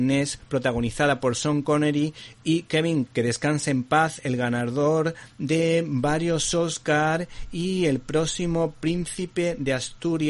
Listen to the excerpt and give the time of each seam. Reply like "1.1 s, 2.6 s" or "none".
3.1 s